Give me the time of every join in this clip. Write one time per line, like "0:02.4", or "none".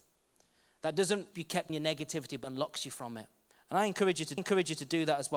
0:01.3
0:01.7
0:02.4
0:03.5
0:04.4